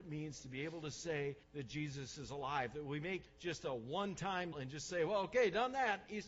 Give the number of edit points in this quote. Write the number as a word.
three